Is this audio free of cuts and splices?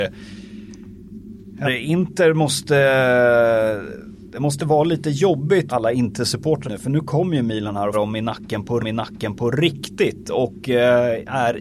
no; 5 cuts; at 1.6 s, 5.7 s, 6.6 s, 7.9 s, 8.8 s

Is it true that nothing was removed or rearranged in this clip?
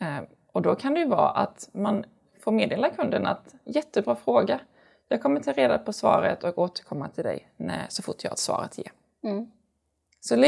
yes; 0 cuts

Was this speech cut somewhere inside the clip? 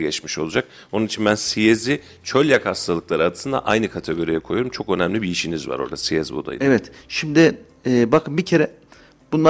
no; 0 cuts

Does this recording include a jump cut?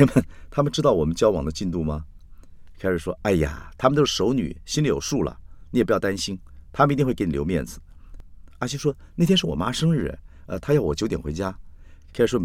no; 0 cuts

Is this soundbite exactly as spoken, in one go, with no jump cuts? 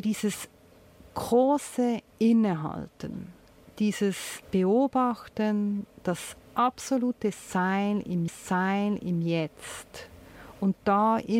no; 4 cuts; at 2.1 s, 4.4 s, 6.5 s, 8.3 s

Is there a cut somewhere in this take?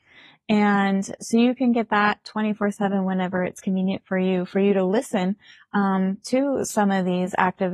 no; 0 cuts

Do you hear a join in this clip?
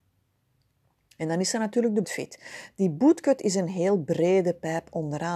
yes; 1 cut; at 2.0 s

